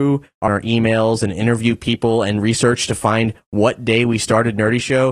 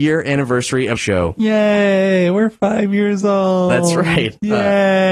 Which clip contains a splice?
second; 1 cut; at 1.0 s

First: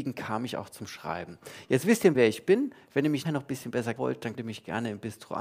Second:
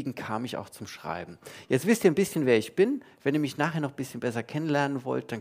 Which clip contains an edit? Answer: first; 4 cuts; at 2.1 s, 3.2 s, 4.0 s, 4.3 s

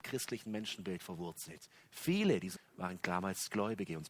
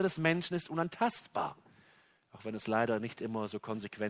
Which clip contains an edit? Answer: first; 1 cut; at 2.6 s

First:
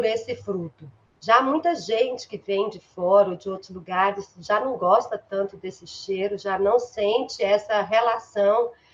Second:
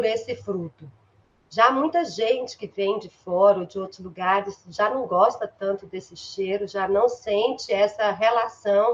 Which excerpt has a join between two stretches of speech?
first; 1 cut; at 1.1 s

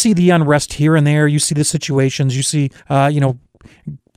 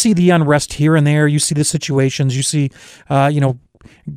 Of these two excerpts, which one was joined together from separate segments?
first; 1 cut; at 2.8 s

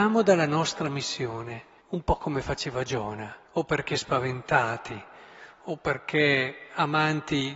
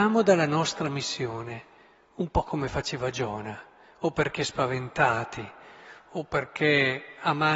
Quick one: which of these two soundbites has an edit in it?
first; 2 cuts; at 1.8 s, 3.4 s

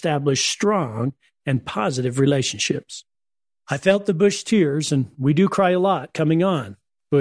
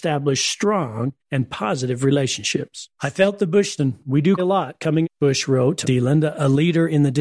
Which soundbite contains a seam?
second; 6 cuts; at 1.2 s, 2.9 s, 3.8 s, 4.4 s, 5.0 s, 5.8 s

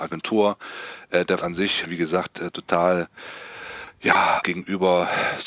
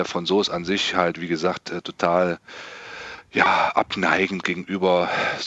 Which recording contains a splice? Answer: first; 3 cuts; at 1.4 s, 1.8 s, 4.4 s

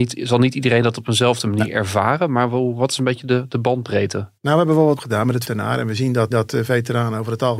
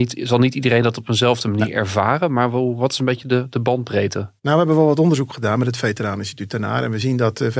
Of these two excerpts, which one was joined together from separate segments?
first; 3 cuts; at 5.0 s, 5.4 s, 6.3 s

